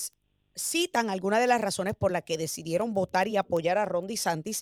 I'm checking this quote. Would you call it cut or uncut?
uncut